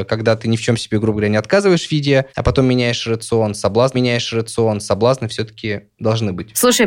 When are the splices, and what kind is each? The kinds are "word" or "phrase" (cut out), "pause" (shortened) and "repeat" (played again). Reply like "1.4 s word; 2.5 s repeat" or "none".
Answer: 2.3 s pause; 3.9 s repeat